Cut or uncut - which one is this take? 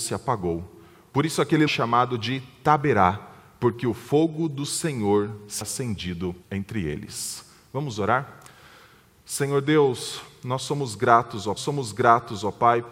cut